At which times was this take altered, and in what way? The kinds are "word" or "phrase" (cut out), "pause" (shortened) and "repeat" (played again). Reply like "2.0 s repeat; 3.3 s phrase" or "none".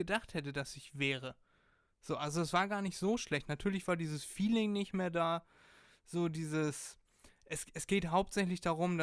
none